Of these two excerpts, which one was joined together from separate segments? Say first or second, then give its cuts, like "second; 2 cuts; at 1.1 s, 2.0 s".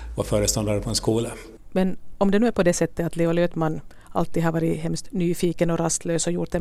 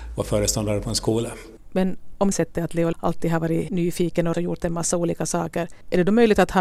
second; 4 cuts; at 2.3 s, 2.9 s, 3.7 s, 4.3 s